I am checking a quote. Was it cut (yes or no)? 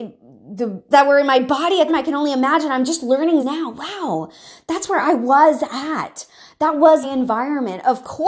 yes